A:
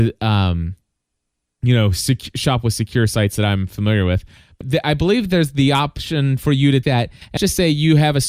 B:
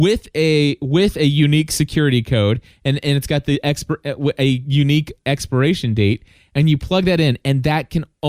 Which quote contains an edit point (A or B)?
A